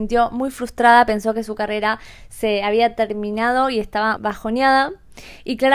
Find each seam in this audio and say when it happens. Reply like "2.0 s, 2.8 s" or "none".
4.2 s